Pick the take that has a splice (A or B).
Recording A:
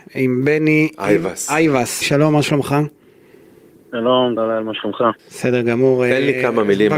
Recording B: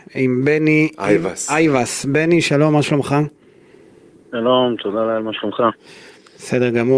A